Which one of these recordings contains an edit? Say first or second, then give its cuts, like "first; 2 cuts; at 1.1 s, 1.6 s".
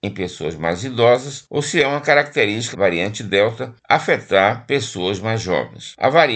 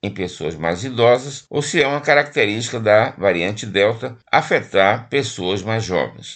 first; 1 cut; at 2.7 s